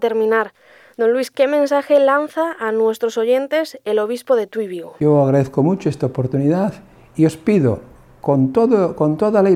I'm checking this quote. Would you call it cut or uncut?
uncut